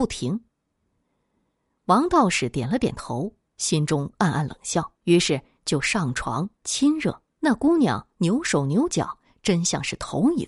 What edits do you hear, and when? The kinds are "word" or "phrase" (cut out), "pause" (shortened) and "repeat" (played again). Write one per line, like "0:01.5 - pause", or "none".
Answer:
0:05.0 - pause
0:07.3 - pause